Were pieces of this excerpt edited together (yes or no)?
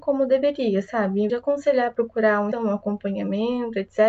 yes